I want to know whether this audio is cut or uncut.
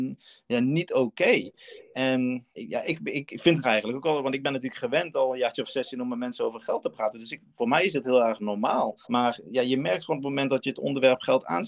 cut